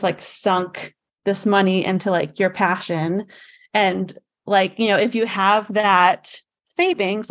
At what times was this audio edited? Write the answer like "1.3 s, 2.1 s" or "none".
none